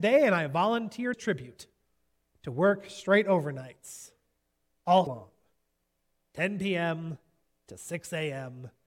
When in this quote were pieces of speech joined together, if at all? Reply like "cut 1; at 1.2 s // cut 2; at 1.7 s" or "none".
cut 1; at 1.1 s // cut 2; at 5.1 s